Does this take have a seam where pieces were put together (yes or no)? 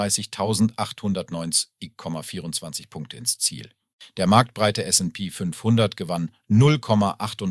no